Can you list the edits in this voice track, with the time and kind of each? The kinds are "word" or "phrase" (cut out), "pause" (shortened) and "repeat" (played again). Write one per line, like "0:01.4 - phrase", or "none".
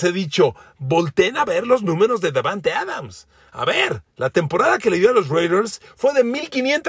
0:04.1 - pause